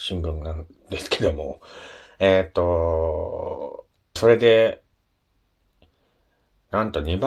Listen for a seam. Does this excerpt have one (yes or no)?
yes